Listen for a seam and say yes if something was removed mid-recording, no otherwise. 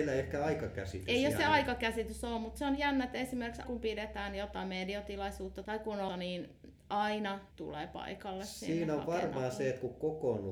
yes